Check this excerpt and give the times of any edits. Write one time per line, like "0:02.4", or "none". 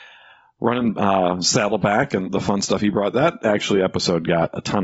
0:02.2